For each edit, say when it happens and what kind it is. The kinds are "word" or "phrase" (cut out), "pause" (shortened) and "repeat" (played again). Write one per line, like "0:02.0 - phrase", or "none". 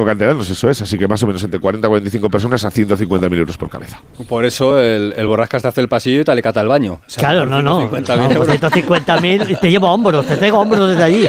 none